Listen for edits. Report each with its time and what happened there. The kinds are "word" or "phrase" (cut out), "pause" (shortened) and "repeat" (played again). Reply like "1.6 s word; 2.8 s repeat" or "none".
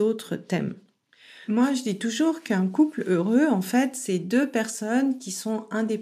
none